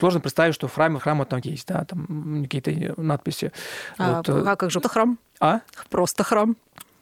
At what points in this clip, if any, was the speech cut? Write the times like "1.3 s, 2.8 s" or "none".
1.0 s, 1.4 s, 4.8 s